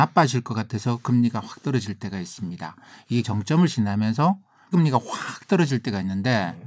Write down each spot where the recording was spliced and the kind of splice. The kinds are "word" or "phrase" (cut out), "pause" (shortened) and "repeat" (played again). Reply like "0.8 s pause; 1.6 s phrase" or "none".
3.2 s word; 4.7 s word